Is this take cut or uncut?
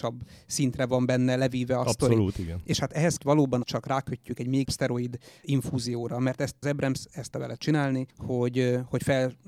cut